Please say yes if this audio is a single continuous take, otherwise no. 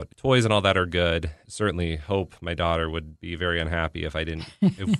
yes